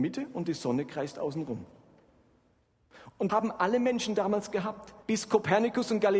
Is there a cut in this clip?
yes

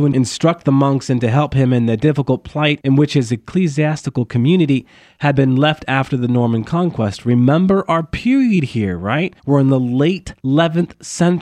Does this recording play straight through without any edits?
no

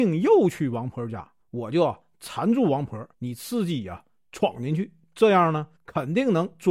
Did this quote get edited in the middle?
yes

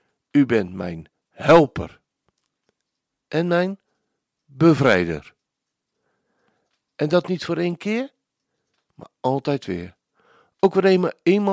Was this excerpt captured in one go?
yes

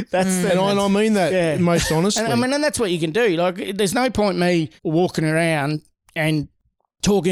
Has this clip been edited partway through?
yes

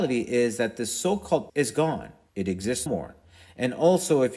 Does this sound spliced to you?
yes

